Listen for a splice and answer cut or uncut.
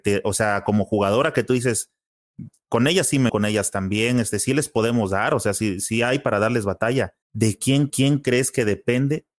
cut